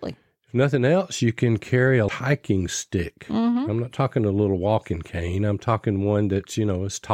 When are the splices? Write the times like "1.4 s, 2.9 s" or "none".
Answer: 2.1 s